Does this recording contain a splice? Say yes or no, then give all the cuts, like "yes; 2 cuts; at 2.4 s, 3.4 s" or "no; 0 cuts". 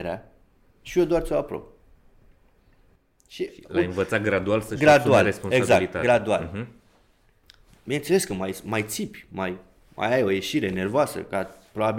no; 0 cuts